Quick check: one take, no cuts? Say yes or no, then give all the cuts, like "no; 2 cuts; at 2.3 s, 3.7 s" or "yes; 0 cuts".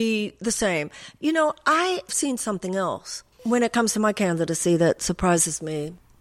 no; 2 cuts; at 2.1 s, 3.3 s